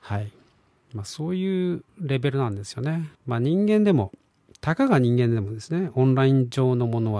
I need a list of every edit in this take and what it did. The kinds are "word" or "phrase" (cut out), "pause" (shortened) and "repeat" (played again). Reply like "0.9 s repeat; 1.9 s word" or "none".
1.9 s pause; 3.1 s pause